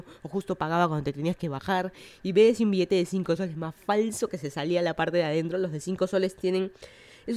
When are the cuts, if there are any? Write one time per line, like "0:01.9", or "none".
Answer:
none